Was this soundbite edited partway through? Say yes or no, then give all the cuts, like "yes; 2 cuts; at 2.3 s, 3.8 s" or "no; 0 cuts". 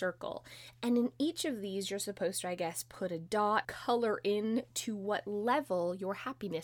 yes; 1 cut; at 3.6 s